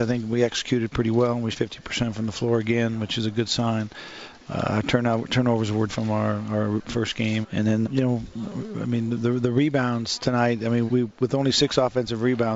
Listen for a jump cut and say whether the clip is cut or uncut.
cut